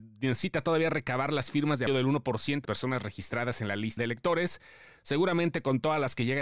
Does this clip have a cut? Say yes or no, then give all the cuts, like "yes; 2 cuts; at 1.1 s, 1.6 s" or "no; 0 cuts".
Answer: yes; 3 cuts; at 1.9 s, 2.6 s, 4.0 s